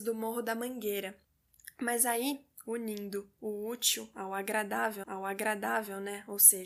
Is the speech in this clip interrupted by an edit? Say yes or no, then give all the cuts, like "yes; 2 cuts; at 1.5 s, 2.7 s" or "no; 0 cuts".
yes; 1 cut; at 5.0 s